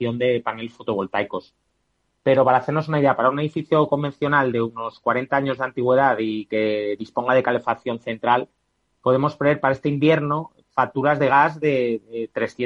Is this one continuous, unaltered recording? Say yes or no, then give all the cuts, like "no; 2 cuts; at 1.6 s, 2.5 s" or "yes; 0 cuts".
yes; 0 cuts